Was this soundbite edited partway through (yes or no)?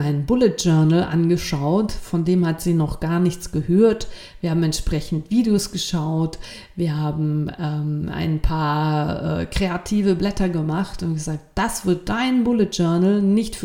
no